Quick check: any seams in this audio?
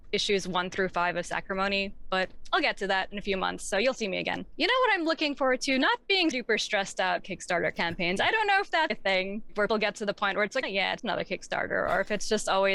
yes; 6 cuts; at 6.3 s, 7.2 s, 8.9 s, 9.7 s, 10.6 s, 11.0 s

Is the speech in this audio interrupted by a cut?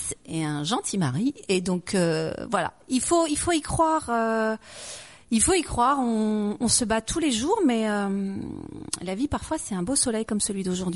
no; 0 cuts

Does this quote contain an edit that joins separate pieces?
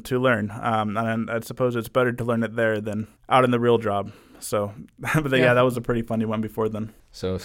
yes; 1 cut; at 3.2 s

